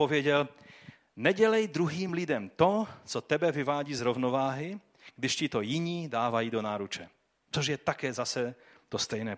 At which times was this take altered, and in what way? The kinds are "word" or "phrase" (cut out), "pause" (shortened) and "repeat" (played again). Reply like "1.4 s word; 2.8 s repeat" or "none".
none

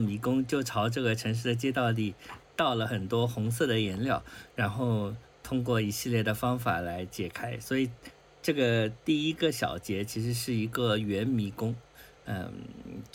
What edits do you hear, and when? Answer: none

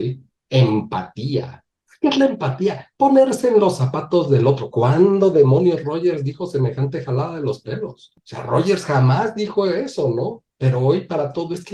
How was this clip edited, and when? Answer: none

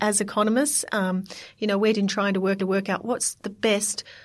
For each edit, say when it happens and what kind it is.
1.9 s word; 2.6 s repeat

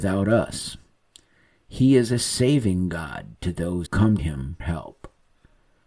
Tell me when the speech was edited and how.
3.9 s word; 4.2 s word; 4.6 s word

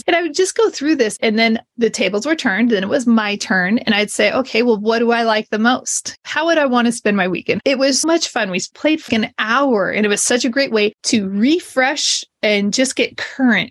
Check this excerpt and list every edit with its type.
8.0 s word; 9.1 s word

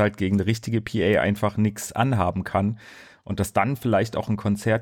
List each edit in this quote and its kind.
none

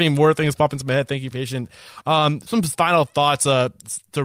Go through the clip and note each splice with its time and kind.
1.3 s word; 2.5 s word

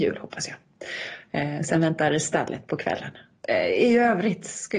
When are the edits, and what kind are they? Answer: none

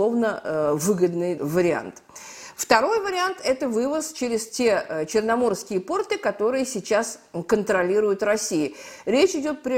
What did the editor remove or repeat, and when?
1.4 s phrase

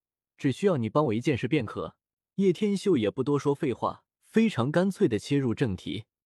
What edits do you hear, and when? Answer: 2.1 s pause; 4.1 s pause

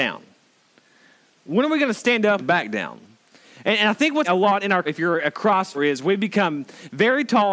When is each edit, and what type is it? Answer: 2.4 s word; 4.2 s word; 4.9 s word; 5.7 s word

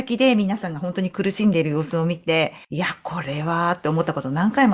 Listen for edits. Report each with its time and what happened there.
2.6 s pause

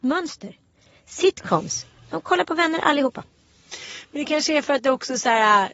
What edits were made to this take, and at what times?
none

